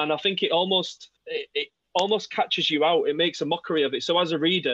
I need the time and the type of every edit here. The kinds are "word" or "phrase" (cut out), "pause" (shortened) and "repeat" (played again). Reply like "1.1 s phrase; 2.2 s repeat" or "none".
1.2 s pause